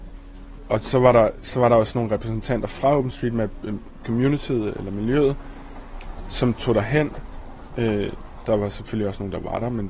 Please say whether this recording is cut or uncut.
uncut